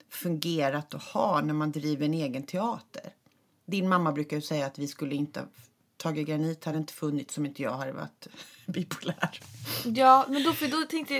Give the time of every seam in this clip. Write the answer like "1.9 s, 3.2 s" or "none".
none